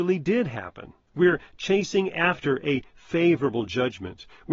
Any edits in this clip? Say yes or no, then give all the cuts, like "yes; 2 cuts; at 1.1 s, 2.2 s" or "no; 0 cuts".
yes; 1 cut; at 1.0 s